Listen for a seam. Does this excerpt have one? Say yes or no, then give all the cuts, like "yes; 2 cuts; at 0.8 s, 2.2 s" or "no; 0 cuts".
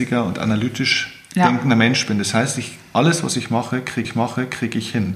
yes; 1 cut; at 4.0 s